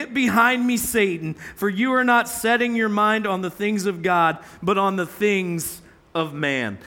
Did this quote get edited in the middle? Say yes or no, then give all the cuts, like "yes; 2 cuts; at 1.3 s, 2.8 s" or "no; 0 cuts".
no; 0 cuts